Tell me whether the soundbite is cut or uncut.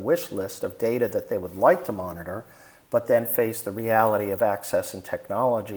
uncut